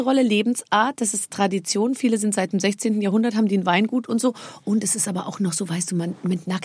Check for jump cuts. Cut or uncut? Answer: uncut